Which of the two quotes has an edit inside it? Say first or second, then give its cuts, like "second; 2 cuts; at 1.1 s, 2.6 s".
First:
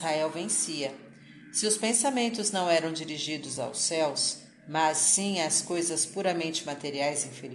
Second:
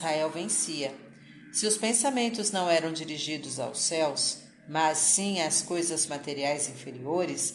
second; 1 cut; at 6.1 s